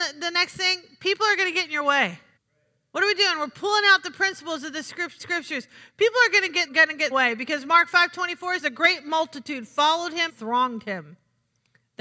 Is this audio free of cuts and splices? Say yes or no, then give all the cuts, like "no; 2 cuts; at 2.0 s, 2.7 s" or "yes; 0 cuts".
no; 6 cuts; at 2.4 s, 5.2 s, 6.7 s, 7.1 s, 8.6 s, 10.3 s